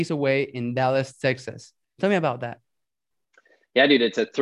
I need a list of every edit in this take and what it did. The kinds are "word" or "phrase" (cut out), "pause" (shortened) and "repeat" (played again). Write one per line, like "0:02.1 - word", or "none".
none